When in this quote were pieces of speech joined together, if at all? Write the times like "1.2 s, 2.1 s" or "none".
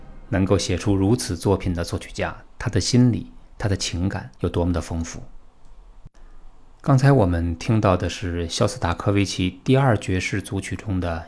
4.4 s